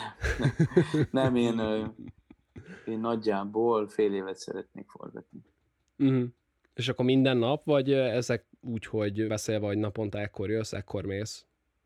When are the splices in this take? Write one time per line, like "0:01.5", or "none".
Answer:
0:08.6
0:09.3

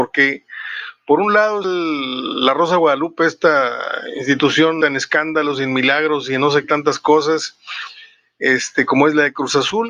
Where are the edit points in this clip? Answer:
0:01.6
0:04.8
0:06.6

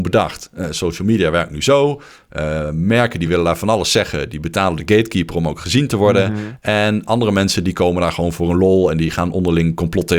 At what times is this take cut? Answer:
none

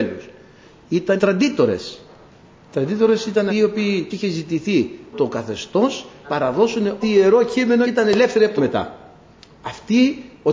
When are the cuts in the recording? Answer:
0:01.2
0:03.5
0:04.1
0:05.1
0:06.2
0:07.0
0:07.8
0:08.6

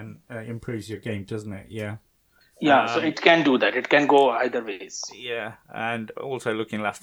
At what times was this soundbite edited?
0:02.4

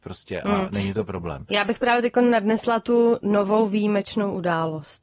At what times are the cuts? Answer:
none

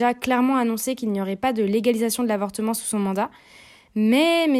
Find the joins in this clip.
none

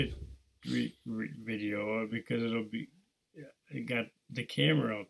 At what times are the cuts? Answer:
none

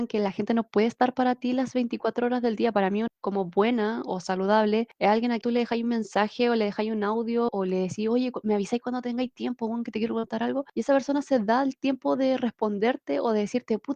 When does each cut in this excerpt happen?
0:03.1
0:05.4
0:07.5

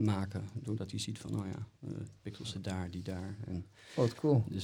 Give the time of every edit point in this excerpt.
0:02.2

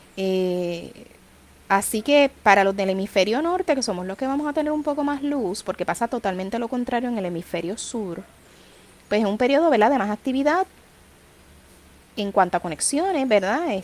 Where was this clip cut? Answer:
none

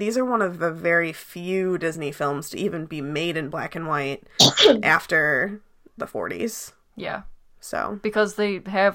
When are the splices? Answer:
none

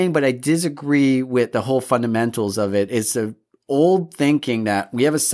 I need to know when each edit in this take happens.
none

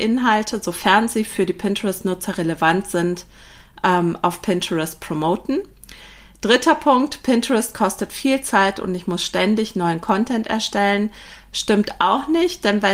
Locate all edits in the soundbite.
none

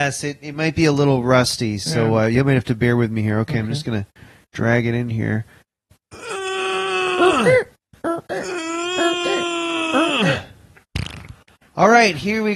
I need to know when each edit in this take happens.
none

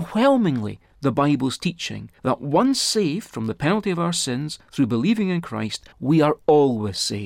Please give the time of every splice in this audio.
0:02.2
0:05.9

